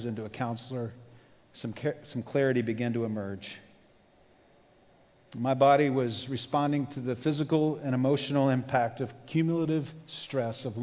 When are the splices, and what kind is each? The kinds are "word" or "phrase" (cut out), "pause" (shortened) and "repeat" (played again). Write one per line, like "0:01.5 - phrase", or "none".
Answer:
none

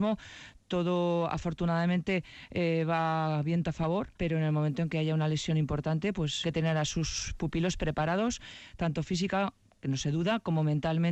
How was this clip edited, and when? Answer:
0:04.2 - pause
0:06.4 - phrase

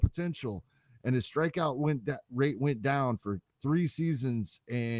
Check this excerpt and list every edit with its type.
0:03.5 - pause

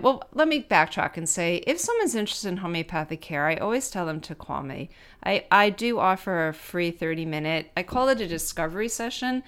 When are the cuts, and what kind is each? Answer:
none

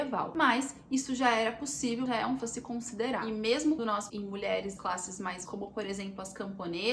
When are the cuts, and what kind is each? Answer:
0:02.1 - word
0:02.4 - word
0:03.8 - word
0:04.1 - word
0:04.8 - word
0:05.5 - word

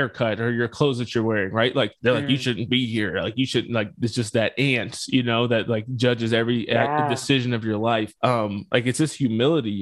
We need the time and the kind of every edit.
0:02.0 - pause
0:08.2 - pause

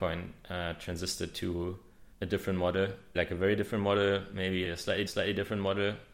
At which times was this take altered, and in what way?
0:02.1 - pause
0:03.1 - word
0:04.6 - phrase
0:05.1 - repeat

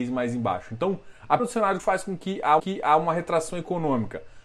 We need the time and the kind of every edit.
0:01.4 - word
0:01.8 - phrase
0:02.6 - repeat

